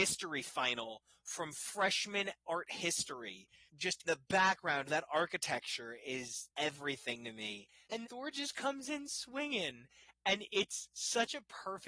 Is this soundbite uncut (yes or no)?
no